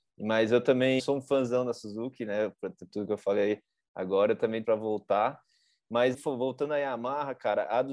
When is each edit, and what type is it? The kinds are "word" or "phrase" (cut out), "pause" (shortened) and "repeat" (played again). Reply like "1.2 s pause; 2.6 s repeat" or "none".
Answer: 1.0 s word; 2.9 s word; 4.6 s word; 6.1 s word